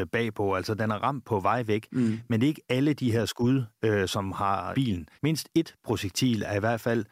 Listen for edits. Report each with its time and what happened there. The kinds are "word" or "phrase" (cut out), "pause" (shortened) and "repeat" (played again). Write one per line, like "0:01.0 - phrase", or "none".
0:04.7 - phrase
0:05.1 - pause